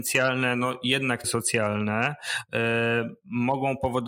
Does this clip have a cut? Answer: yes; 1 cut; at 1.2 s

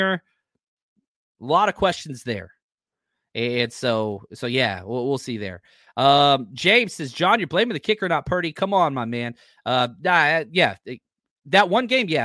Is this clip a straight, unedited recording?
yes; 0 cuts

